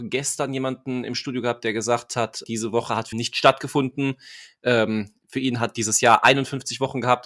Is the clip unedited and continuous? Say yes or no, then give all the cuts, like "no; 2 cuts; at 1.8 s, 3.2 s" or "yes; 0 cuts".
no; 2 cuts; at 2.4 s, 3.1 s